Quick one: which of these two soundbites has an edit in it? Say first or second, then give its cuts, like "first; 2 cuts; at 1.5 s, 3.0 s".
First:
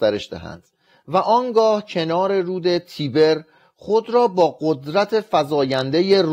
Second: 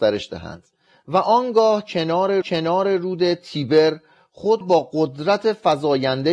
second; 2 cuts; at 2.4 s, 4.6 s